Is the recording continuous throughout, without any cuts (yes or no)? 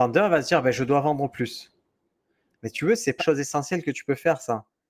no